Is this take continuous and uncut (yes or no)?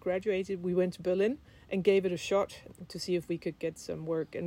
yes